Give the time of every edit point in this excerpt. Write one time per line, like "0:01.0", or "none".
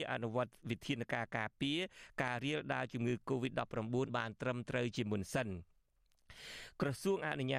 0:04.1